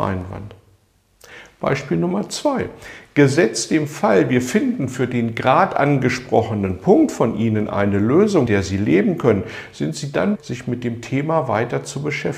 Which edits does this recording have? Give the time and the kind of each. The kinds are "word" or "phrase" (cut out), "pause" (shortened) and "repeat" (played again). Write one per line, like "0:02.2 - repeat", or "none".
0:08.5 - word
0:10.4 - word